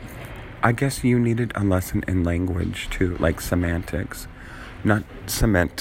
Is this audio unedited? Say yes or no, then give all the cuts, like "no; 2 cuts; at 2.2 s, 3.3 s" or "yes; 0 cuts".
yes; 0 cuts